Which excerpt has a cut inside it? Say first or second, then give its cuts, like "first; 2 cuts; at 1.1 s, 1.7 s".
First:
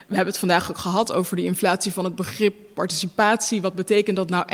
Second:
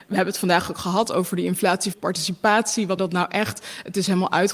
second; 2 cuts; at 1.9 s, 3.0 s